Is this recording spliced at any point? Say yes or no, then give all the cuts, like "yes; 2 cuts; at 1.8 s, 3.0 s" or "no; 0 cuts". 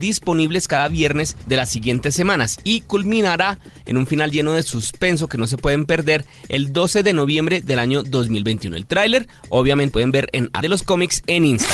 yes; 2 cuts; at 9.9 s, 10.6 s